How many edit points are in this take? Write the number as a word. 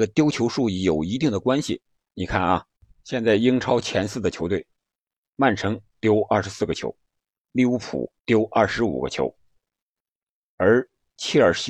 one